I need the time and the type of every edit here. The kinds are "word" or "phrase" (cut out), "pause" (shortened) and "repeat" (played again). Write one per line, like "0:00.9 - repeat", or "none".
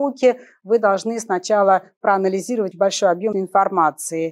0:02.7 - word
0:03.3 - word